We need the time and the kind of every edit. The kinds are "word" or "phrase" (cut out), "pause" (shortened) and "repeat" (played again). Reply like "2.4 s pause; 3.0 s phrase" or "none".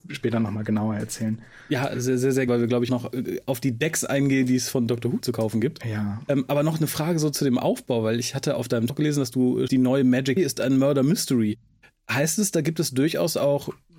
1.9 s word; 2.5 s word; 2.9 s word; 5.2 s word; 8.9 s word; 9.7 s word; 10.4 s word